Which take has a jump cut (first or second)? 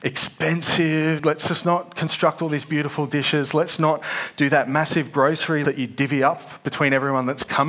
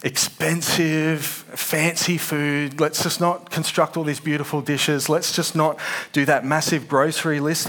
first